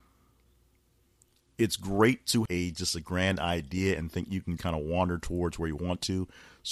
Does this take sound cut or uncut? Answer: cut